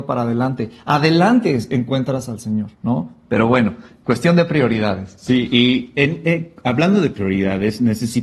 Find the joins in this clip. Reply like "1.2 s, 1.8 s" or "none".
2.8 s